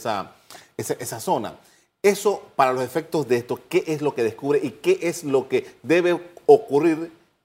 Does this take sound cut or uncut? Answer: uncut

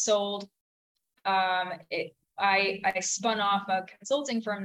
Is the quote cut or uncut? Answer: uncut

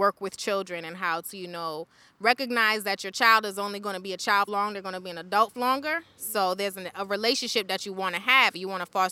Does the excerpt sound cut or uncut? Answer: cut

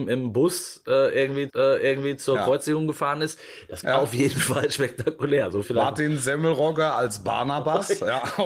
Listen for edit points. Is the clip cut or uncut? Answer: cut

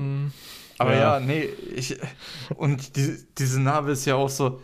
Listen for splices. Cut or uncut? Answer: uncut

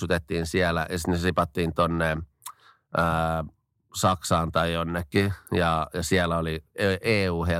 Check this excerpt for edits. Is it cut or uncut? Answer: uncut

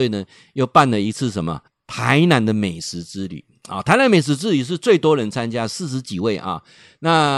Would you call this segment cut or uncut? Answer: cut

